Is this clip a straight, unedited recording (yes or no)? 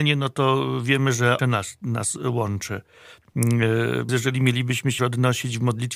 no